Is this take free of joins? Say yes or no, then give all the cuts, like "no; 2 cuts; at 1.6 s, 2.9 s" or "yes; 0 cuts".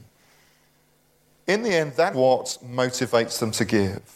no; 1 cut; at 2.1 s